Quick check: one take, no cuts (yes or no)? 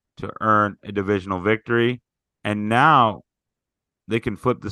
yes